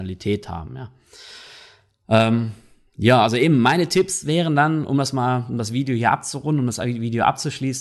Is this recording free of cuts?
yes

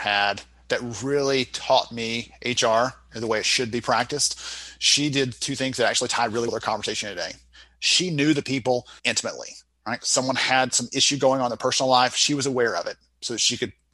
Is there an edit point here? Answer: yes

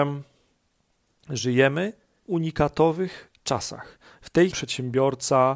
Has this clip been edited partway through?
yes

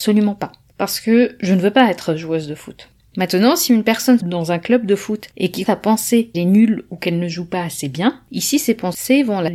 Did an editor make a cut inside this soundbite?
yes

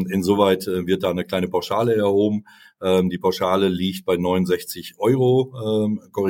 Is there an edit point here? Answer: no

